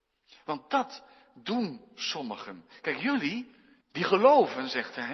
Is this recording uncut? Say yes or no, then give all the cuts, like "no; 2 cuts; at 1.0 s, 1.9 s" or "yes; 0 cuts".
no; 1 cut; at 3.8 s